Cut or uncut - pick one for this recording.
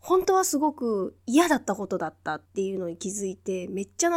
cut